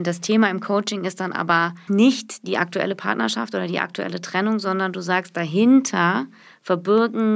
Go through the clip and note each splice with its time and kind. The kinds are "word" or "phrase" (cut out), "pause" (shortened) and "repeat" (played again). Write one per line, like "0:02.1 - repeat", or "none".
0:01.9 - word